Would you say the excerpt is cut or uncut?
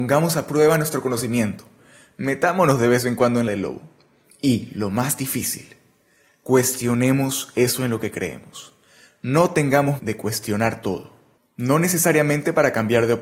cut